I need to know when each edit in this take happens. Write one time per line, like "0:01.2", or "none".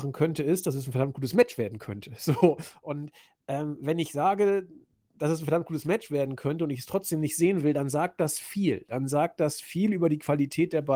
none